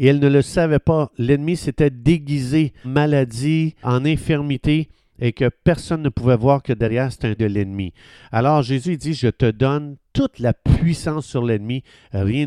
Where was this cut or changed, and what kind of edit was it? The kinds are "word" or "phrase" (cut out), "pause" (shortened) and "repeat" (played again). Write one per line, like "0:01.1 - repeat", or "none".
0:02.8 - word
0:03.8 - word
0:07.4 - word

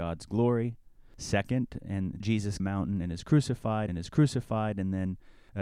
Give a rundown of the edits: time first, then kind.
0:02.2 - phrase
0:02.6 - phrase
0:03.9 - repeat

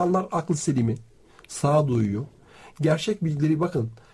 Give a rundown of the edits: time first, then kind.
none

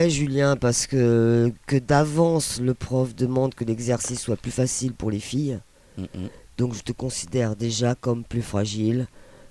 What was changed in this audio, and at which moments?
none

